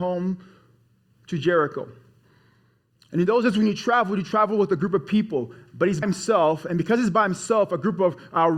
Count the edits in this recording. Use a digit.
1